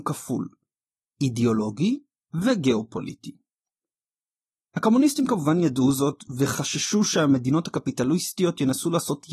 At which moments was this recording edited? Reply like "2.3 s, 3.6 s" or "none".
none